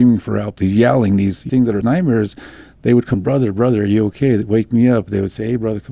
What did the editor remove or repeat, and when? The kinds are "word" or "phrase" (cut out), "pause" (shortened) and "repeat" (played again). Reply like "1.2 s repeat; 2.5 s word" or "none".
1.5 s phrase; 1.8 s phrase; 3.1 s word